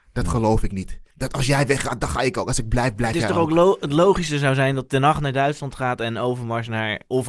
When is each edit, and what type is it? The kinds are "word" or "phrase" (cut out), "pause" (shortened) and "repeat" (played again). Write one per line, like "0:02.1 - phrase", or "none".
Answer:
0:01.1 - pause